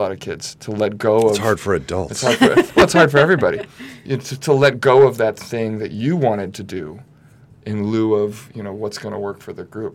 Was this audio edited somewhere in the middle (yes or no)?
no